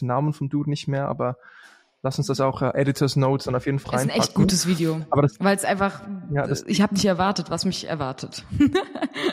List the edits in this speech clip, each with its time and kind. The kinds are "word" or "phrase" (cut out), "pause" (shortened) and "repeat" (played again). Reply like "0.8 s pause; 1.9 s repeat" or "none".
3.8 s word

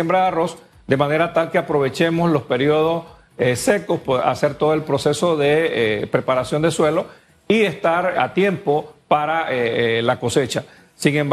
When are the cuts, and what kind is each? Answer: 8.1 s word

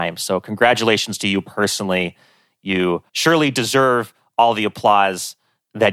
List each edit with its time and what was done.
3.1 s pause

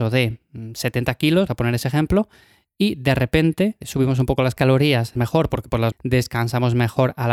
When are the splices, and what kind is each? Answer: 1.5 s word; 3.8 s word; 5.2 s word; 5.9 s word

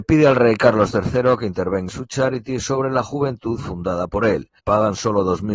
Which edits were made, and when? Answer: 1.9 s word; 4.6 s pause

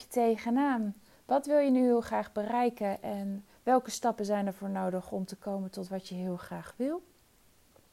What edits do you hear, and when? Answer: none

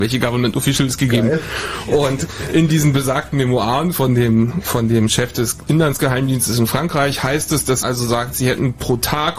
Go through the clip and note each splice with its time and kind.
7.8 s word

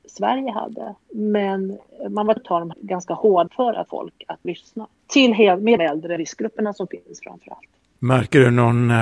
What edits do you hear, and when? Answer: 1.0 s pause; 2.4 s word; 2.7 s word; 3.5 s word; 3.9 s word; 4.4 s word; 5.8 s phrase; 6.2 s phrase

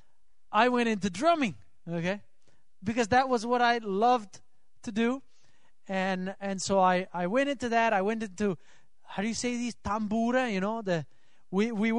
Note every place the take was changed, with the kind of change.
none

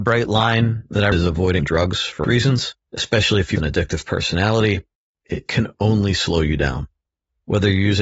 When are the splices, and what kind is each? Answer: 1.1 s word; 1.6 s word; 2.2 s word; 2.8 s pause; 3.6 s phrase; 5.0 s pause

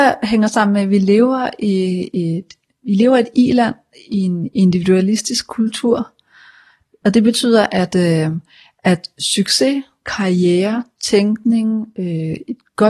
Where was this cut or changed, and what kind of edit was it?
none

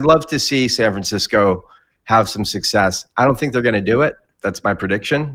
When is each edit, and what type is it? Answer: none

